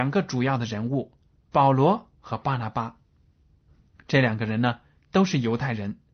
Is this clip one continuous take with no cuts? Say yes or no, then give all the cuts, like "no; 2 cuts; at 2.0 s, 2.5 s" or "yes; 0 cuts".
yes; 0 cuts